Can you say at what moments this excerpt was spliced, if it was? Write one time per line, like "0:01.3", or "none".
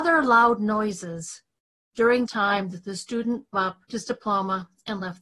0:02.3
0:03.5
0:03.9